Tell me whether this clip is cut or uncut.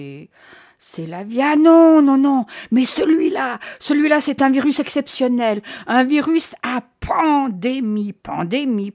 uncut